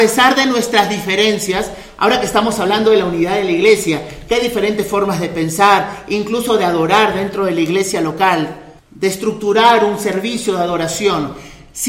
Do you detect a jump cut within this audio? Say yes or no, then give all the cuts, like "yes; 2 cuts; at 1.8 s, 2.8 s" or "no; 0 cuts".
yes; 1 cut; at 8.8 s